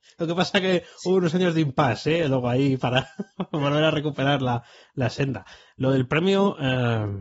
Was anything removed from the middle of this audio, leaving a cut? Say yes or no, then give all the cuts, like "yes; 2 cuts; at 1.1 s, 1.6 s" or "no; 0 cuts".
no; 0 cuts